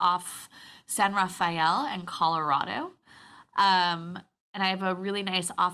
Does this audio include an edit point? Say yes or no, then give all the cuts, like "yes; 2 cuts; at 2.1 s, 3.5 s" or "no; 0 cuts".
no; 0 cuts